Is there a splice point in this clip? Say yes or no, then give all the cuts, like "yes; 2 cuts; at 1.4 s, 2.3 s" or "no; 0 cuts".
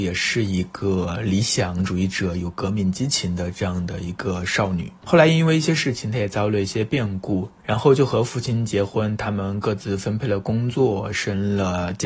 no; 0 cuts